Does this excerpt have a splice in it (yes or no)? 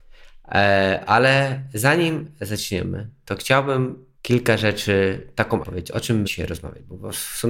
yes